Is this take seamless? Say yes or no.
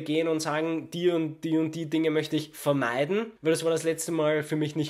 no